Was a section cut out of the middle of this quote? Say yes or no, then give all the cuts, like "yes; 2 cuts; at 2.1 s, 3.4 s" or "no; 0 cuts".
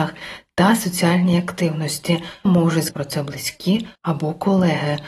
yes; 3 cuts; at 2.5 s, 2.9 s, 4.0 s